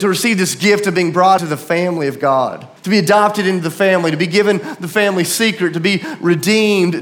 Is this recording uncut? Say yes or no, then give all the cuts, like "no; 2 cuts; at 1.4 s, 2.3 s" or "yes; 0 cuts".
no; 2 cuts; at 1.4 s, 2.8 s